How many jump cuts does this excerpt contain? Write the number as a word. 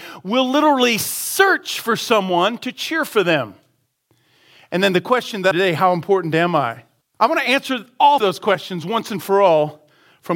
three